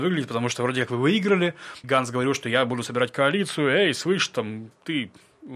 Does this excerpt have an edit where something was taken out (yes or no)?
yes